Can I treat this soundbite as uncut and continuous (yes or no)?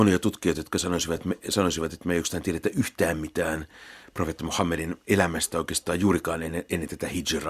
yes